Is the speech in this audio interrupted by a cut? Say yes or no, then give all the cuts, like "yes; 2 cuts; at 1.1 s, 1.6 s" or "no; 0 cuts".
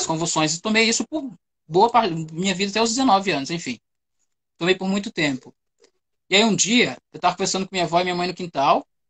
no; 0 cuts